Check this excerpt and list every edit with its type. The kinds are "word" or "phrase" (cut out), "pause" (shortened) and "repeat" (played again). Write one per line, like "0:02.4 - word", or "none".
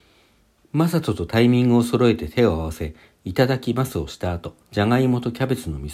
0:04.6 - pause